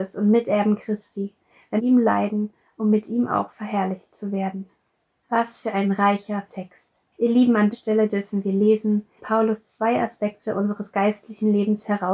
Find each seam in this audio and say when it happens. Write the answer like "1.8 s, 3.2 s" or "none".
1.8 s, 5.1 s, 6.5 s, 7.1 s, 7.7 s, 9.2 s